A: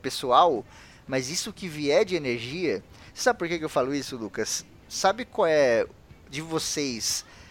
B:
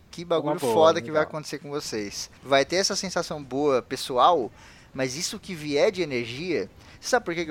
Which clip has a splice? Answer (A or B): B